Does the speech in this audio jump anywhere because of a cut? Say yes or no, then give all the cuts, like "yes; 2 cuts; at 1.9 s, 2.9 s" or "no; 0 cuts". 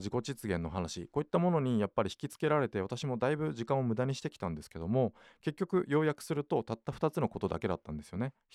no; 0 cuts